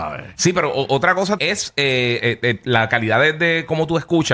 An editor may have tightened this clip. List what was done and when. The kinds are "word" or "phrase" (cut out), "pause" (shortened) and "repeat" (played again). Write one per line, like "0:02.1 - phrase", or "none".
0:01.4 - word
0:02.2 - phrase